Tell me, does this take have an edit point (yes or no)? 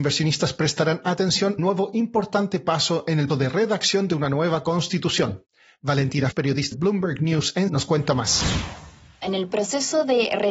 yes